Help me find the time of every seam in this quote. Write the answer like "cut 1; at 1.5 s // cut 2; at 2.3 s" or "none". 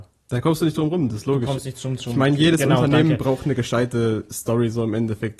none